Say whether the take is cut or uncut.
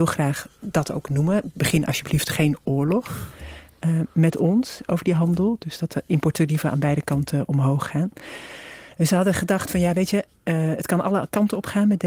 uncut